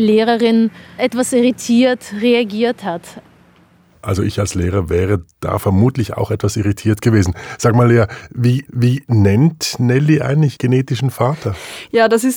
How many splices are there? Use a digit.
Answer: 3